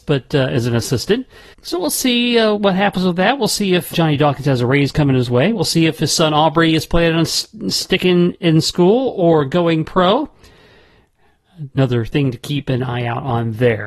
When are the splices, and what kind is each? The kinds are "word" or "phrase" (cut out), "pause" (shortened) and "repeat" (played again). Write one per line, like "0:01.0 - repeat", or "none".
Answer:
0:01.5 - word
0:02.5 - word
0:03.9 - word